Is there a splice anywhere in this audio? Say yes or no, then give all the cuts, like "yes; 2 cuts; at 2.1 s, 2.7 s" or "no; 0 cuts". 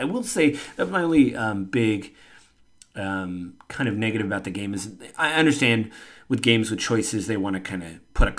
no; 0 cuts